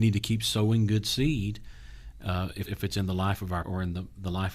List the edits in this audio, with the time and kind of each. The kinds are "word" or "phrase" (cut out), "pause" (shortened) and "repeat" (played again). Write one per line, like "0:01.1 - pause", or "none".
0:02.6 - word
0:03.6 - word